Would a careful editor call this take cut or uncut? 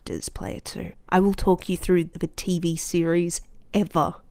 cut